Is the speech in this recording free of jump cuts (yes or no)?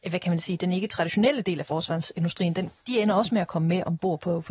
yes